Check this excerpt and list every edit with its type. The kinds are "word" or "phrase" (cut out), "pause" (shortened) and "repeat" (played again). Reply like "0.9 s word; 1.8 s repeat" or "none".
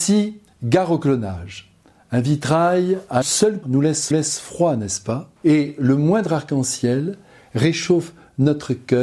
2.0 s pause; 3.2 s word; 3.6 s word; 4.1 s repeat; 5.4 s pause